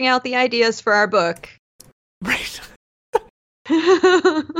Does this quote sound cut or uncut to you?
uncut